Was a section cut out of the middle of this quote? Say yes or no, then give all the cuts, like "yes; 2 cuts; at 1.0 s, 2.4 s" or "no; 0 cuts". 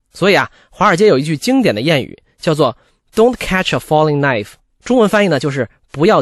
yes; 1 cut; at 4.7 s